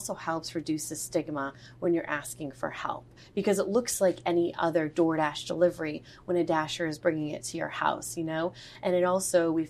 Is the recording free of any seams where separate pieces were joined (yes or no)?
yes